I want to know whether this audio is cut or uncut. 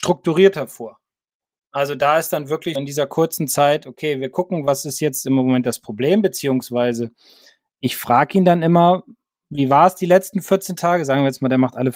cut